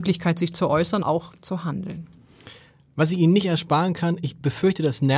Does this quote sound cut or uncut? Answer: cut